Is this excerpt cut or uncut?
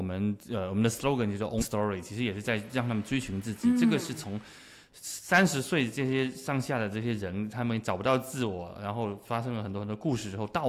cut